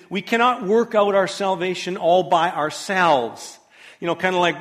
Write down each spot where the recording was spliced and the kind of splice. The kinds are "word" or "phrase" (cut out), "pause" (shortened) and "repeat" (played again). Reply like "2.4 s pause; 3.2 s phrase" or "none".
none